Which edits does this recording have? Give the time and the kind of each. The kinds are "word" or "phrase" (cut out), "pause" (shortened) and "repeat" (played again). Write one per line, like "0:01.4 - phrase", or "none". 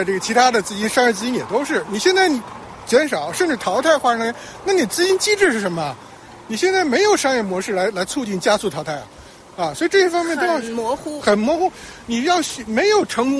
none